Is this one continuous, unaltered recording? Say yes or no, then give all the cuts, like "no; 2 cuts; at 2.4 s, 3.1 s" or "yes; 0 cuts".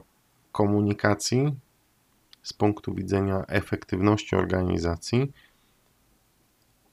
yes; 0 cuts